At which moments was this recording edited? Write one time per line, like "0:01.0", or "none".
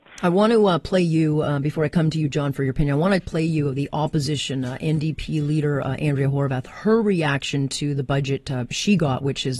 none